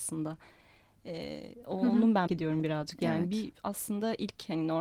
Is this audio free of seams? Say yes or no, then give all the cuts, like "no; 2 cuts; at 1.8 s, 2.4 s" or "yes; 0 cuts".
no; 1 cut; at 2.3 s